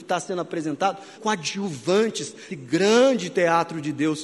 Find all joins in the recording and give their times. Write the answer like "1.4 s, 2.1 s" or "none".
1.1 s, 2.5 s